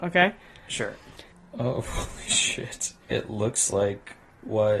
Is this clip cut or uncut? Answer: uncut